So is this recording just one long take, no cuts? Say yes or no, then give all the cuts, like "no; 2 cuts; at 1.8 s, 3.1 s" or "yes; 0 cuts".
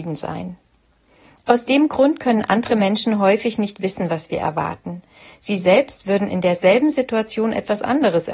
yes; 0 cuts